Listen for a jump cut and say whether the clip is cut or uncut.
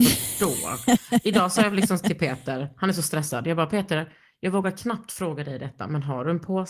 uncut